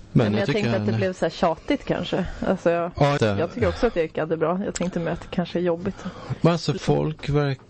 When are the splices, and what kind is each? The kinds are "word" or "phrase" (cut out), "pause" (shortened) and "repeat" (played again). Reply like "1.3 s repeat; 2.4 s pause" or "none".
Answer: 3.2 s word; 6.8 s word

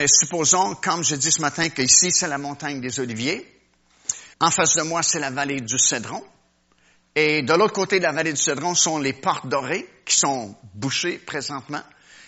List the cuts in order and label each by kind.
4.3 s pause

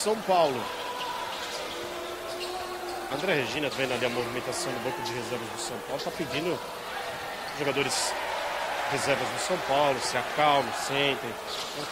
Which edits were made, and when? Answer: 3.7 s word

